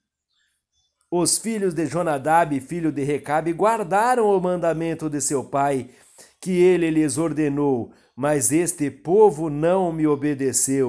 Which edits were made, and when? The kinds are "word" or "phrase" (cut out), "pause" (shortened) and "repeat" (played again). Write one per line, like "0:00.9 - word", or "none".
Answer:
none